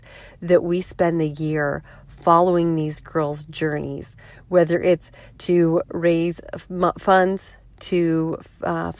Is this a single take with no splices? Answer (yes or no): yes